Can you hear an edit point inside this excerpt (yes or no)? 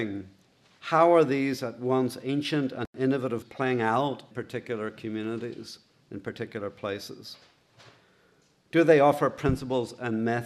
yes